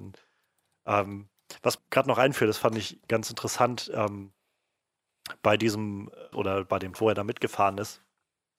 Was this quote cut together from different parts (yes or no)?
yes